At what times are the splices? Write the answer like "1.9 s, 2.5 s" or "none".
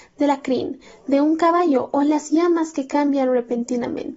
none